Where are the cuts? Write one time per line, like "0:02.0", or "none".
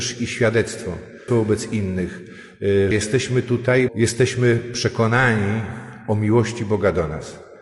0:01.3
0:02.9
0:03.9